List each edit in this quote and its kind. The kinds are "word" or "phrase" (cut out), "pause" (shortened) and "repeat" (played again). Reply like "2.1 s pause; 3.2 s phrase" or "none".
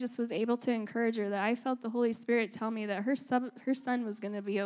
none